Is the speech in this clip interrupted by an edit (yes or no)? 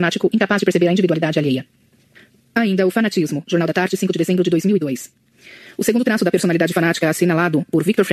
no